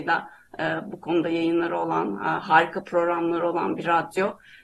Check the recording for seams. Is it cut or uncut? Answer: uncut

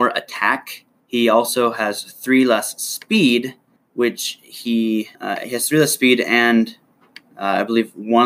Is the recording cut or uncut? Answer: cut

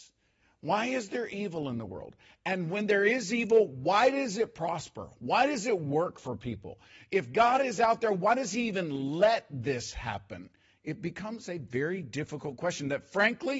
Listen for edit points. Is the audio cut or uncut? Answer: uncut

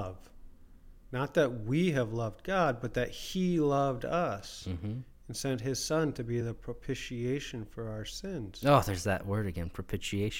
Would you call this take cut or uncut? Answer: uncut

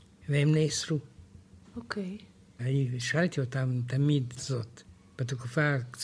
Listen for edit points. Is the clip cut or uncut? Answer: cut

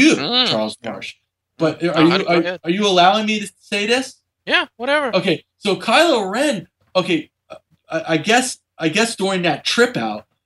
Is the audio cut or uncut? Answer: uncut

